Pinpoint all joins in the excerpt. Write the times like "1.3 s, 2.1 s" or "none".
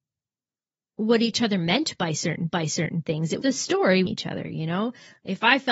2.5 s, 3.4 s, 4.0 s

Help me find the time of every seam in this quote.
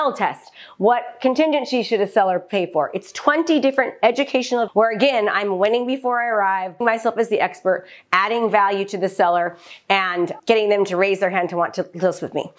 4.7 s, 6.8 s, 10.4 s

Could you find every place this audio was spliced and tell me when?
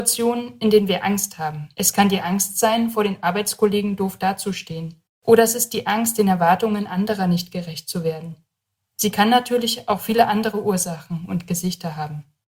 1.7 s, 5.1 s

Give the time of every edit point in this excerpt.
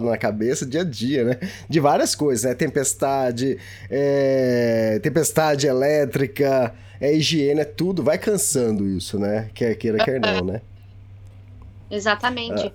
none

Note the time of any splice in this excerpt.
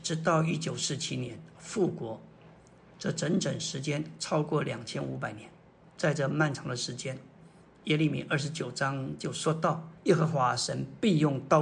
10.0 s

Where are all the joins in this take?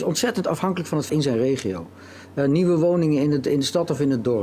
1.1 s

